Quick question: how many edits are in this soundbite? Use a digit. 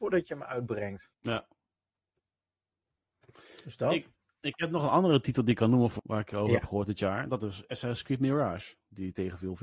2